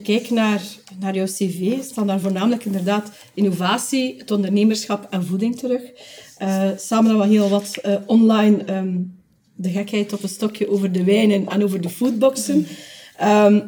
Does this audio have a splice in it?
no; 0 cuts

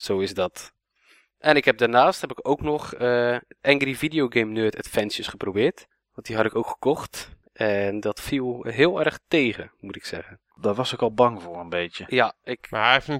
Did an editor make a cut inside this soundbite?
yes; 1 cut; at 7.5 s

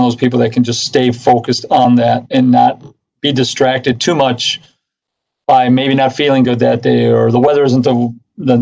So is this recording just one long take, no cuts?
yes; 0 cuts

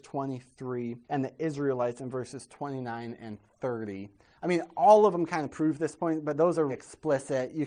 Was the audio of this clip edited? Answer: yes; 2 cuts; at 1.0 s, 6.7 s

